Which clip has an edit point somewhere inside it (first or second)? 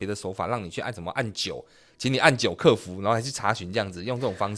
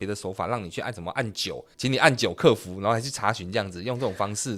second